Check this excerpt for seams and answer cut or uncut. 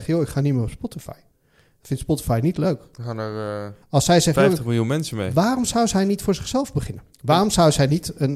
cut